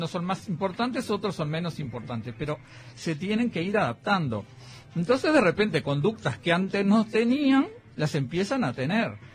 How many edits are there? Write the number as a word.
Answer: zero